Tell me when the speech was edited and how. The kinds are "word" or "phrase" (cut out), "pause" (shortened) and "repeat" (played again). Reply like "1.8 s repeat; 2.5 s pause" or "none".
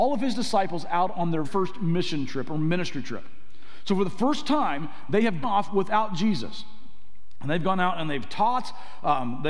1.4 s word; 5.4 s word